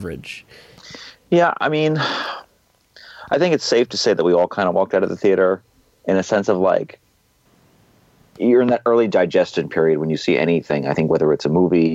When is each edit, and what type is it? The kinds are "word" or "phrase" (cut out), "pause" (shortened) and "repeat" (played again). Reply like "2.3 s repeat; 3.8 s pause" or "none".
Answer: none